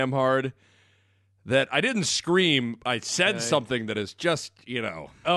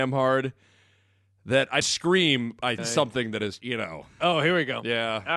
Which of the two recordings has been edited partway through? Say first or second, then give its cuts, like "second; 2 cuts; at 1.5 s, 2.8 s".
second; 3 cuts; at 1.8 s, 2.8 s, 3.6 s